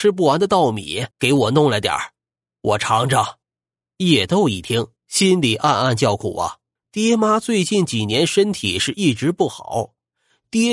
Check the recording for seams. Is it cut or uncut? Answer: cut